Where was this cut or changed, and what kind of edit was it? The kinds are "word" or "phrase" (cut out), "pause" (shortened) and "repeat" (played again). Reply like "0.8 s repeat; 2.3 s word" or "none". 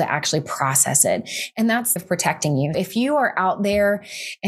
2.0 s phrase; 2.7 s word